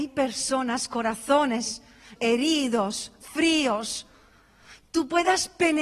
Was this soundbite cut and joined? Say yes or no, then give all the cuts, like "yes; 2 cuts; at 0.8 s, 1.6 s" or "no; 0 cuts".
yes; 1 cut; at 2.2 s